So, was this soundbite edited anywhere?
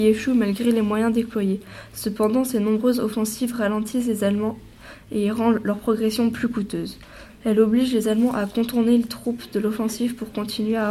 no; 0 cuts

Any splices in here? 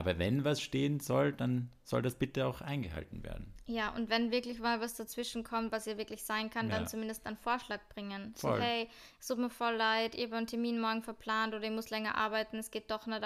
no; 0 cuts

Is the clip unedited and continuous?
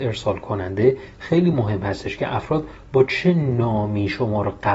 yes; 0 cuts

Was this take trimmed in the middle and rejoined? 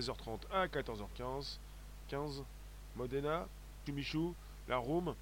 yes; 1 cut; at 3.9 s

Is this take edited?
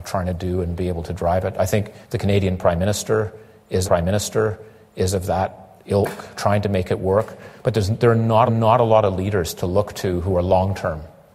yes; 4 cuts; at 2.0 s, 3.8 s, 6.3 s, 8.5 s

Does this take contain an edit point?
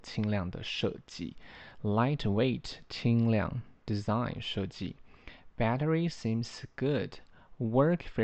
no; 0 cuts

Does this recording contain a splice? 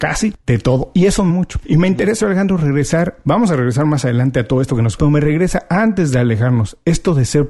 yes; 3 cuts; at 1.3 s, 2.2 s, 5.0 s

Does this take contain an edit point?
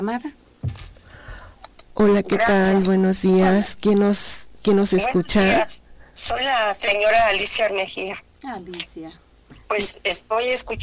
yes; 2 cuts; at 1.9 s, 7.7 s

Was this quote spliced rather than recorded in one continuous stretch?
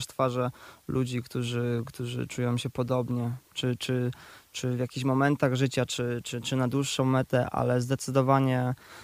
no; 0 cuts

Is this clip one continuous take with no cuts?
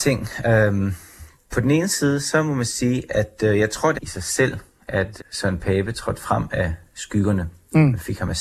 no; 2 cuts; at 3.9 s, 5.2 s

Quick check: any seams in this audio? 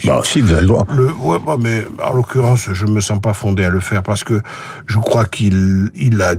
no; 0 cuts

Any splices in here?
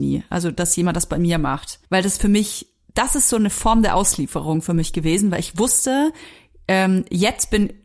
yes; 1 cut; at 1.8 s

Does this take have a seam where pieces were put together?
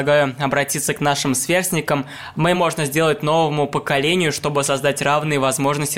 yes; 1 cut; at 2.5 s

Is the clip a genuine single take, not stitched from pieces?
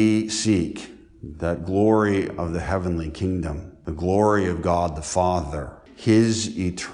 yes; 0 cuts

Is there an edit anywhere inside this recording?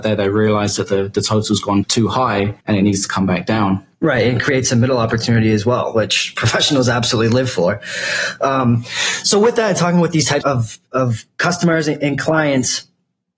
yes; 4 cuts; at 1.8 s, 2.6 s, 3.9 s, 10.4 s

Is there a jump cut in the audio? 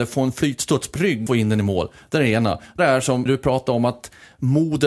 yes; 4 cuts; at 1.0 s, 1.3 s, 2.8 s, 3.3 s

